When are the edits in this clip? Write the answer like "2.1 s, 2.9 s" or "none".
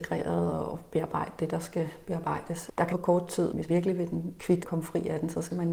2.9 s, 3.7 s, 4.6 s